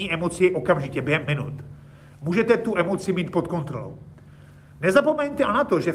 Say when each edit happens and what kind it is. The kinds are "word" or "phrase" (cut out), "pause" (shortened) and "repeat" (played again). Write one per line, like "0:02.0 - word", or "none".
0:01.3 - word